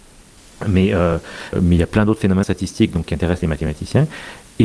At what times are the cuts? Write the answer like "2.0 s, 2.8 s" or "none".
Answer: 1.5 s, 2.4 s